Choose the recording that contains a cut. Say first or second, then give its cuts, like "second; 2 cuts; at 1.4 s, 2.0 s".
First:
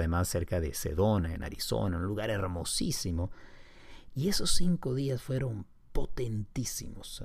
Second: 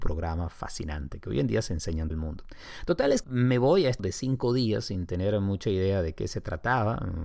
second; 3 cuts; at 2.1 s, 3.2 s, 4.0 s